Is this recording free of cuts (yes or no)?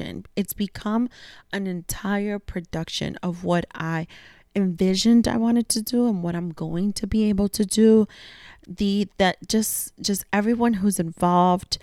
yes